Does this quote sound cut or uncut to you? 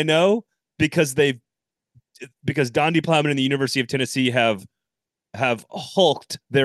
uncut